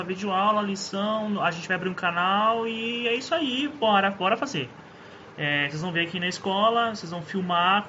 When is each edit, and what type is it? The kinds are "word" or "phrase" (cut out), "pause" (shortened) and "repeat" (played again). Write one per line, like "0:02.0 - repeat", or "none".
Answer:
none